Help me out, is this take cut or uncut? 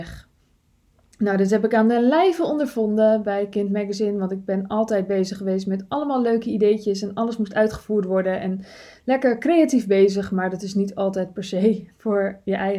uncut